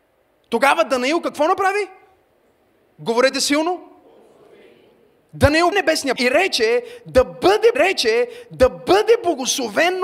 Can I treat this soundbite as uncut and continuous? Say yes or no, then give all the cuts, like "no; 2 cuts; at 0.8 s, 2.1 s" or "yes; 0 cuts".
no; 3 cuts; at 5.7 s, 6.2 s, 7.7 s